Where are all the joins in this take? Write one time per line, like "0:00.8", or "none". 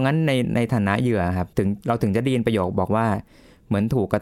0:01.5